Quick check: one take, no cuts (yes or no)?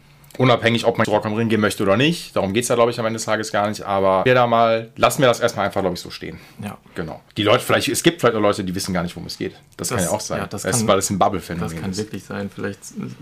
no